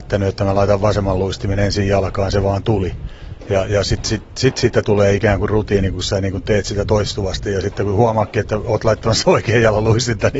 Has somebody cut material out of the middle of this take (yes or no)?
no